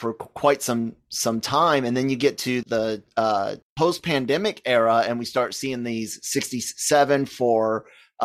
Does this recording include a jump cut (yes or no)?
yes